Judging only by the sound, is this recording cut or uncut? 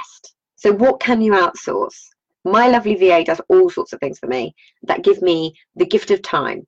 uncut